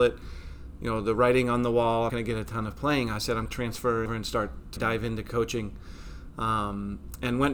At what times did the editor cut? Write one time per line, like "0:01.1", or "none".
0:02.1
0:03.5
0:04.1
0:04.8

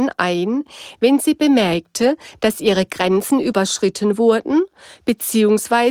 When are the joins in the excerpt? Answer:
none

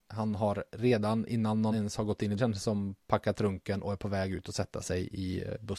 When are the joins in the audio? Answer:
0:01.7
0:02.4

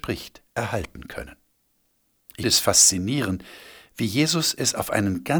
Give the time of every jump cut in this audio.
0:02.4

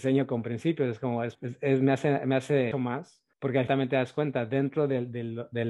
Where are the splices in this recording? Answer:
0:01.3
0:02.7
0:03.3
0:03.7

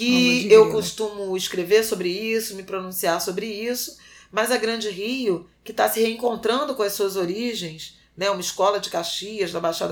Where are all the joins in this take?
none

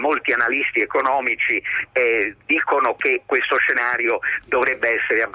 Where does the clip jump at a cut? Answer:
0:02.4

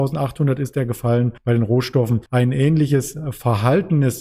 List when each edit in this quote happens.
0:01.4
0:02.3

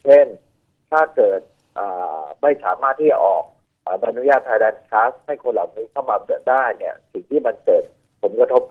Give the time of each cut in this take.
0:03.7

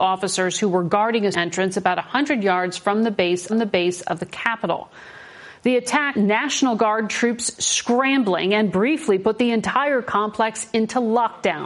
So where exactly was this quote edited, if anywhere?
0:01.3
0:03.5
0:06.1

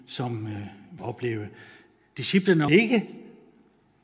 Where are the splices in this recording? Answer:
0:01.0
0:02.7

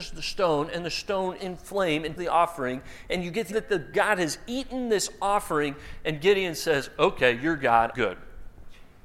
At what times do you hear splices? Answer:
0:01.4
0:02.2
0:03.5
0:03.9
0:07.9

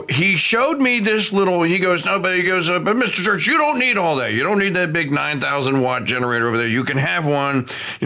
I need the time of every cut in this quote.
none

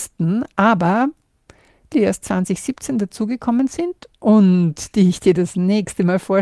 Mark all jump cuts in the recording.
0:01.9

